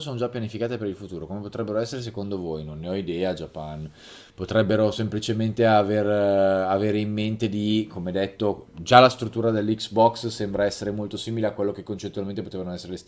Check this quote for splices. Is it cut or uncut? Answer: cut